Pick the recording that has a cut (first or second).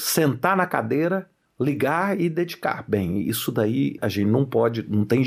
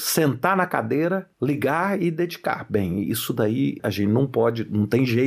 second